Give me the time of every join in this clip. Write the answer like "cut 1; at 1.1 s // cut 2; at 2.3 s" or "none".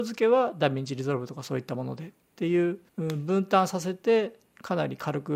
cut 1; at 2.9 s